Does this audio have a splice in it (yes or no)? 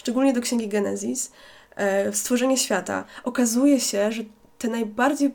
no